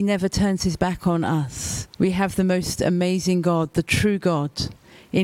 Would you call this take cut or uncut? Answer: cut